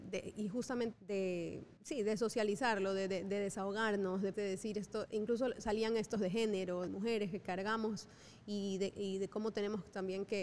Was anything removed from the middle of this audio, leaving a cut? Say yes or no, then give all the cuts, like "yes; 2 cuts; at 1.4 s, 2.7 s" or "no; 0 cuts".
yes; 6 cuts; at 0.9 s, 1.8 s, 4.3 s, 5.1 s, 6.2 s, 6.9 s